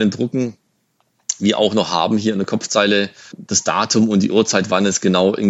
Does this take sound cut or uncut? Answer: cut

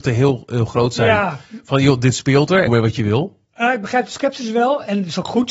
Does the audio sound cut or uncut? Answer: cut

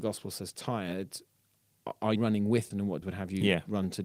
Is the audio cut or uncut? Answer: cut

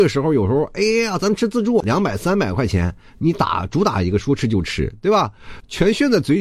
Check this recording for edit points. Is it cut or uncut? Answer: uncut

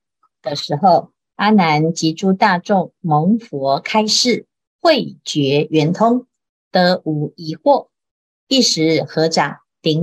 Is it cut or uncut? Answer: uncut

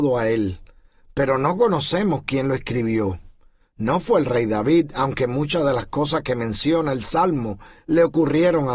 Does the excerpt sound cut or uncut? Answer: uncut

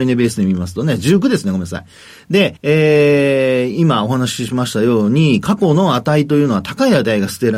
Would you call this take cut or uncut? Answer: cut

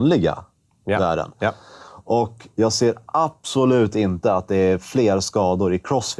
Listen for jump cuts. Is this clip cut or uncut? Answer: uncut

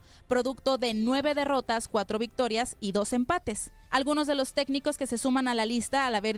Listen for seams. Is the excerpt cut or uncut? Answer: uncut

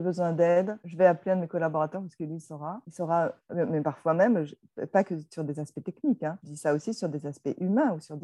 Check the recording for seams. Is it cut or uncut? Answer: uncut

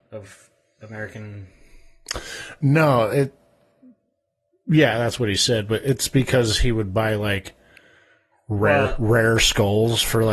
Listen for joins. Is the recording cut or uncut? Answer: uncut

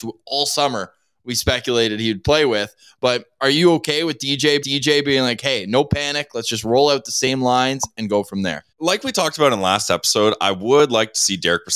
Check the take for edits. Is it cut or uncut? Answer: cut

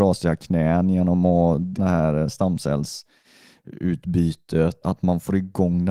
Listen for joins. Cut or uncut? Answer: cut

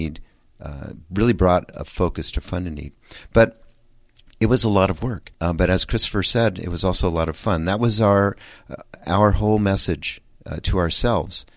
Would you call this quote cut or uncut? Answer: cut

